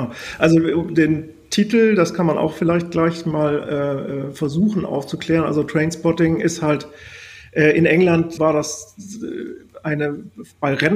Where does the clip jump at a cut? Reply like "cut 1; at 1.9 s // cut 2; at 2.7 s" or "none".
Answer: cut 1; at 8.4 s